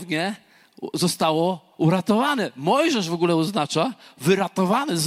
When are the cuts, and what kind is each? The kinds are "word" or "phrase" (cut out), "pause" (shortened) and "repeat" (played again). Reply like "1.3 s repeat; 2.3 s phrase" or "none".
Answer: none